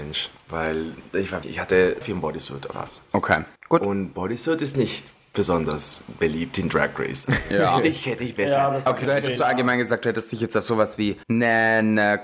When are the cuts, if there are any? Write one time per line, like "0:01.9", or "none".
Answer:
0:01.4
0:02.0
0:02.7
0:03.6
0:09.0
0:11.2